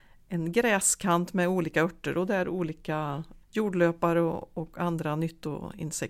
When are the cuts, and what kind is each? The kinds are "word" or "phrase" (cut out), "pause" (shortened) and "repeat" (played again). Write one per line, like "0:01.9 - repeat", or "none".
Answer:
0:03.4 - pause